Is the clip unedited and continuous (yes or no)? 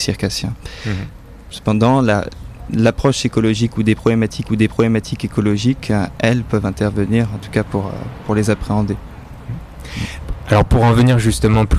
no